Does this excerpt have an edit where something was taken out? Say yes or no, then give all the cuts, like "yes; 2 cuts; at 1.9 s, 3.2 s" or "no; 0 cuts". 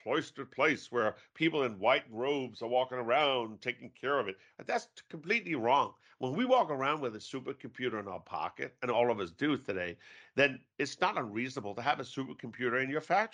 no; 0 cuts